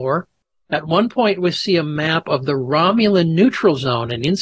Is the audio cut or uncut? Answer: uncut